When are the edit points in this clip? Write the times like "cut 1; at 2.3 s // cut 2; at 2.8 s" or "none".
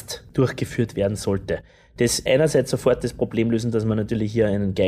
cut 1; at 2.3 s

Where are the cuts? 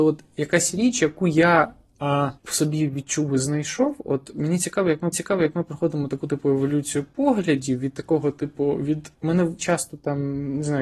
cut 1; at 2.4 s // cut 2; at 5.1 s // cut 3; at 9.1 s // cut 4; at 9.6 s

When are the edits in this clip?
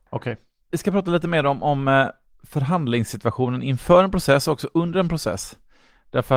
none

